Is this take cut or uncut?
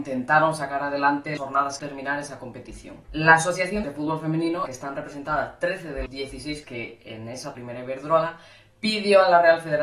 cut